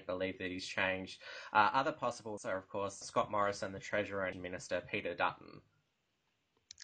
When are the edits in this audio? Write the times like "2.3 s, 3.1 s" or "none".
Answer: 2.4 s, 3.0 s, 4.3 s